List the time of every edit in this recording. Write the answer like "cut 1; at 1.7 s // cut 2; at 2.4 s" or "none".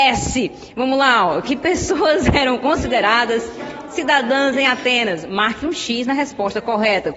none